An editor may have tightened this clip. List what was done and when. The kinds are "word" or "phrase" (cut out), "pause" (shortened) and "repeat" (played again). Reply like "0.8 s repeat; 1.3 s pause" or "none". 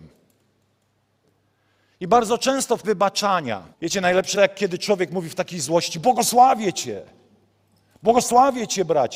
2.8 s phrase; 3.7 s pause; 4.3 s word